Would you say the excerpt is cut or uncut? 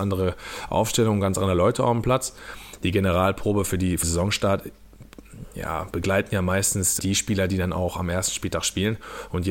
cut